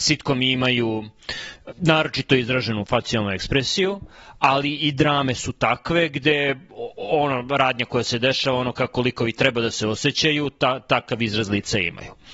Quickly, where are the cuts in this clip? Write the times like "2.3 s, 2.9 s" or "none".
1.7 s